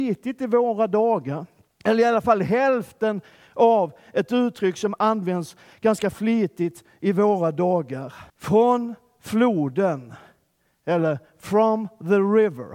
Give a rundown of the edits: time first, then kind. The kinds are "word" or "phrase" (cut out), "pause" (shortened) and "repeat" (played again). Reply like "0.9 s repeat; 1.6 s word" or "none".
1.7 s pause; 8.3 s pause

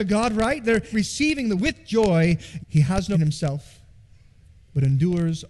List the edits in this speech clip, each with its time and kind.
0.9 s word; 1.6 s word; 2.6 s word; 3.1 s phrase

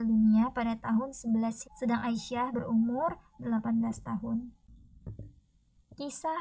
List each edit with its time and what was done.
1.6 s word; 2.5 s word

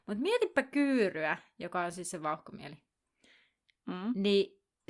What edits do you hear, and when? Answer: none

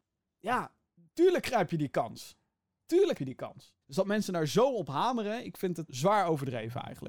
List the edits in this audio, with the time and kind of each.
3.2 s word; 3.8 s pause; 5.9 s word

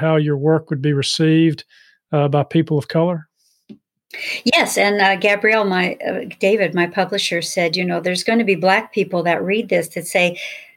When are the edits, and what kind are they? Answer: none

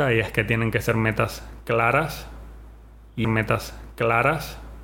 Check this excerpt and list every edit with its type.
3.2 s repeat

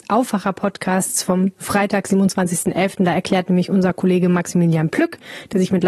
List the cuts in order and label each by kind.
none

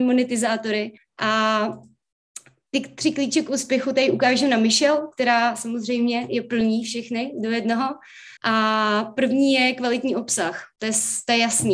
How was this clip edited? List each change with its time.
1.0 s pause; 8.4 s pause; 10.7 s pause

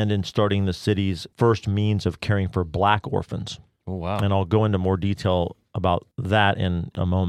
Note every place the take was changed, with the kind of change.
none

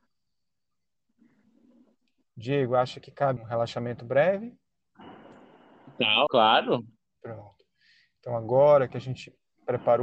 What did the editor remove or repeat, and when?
3.4 s word; 6.3 s word; 7.0 s pause

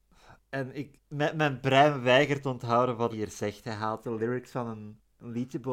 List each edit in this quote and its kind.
3.1 s word

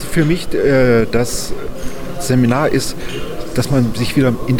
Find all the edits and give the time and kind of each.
none

